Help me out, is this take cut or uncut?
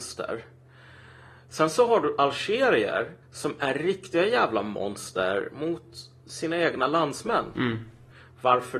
cut